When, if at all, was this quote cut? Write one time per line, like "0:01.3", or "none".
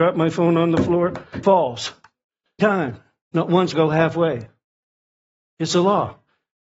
0:01.4
0:02.6
0:03.7